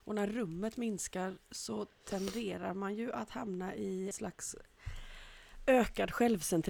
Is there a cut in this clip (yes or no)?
yes